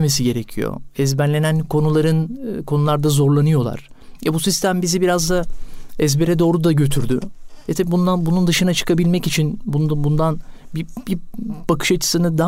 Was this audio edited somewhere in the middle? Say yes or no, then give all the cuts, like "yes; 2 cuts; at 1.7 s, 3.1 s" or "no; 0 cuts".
no; 0 cuts